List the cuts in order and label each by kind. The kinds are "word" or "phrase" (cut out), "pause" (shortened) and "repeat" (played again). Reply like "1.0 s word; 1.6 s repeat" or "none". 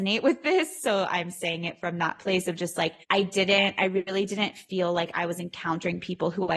3.0 s pause